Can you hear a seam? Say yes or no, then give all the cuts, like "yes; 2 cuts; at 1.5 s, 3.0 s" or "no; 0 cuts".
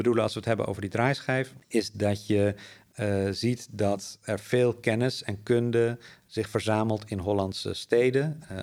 no; 0 cuts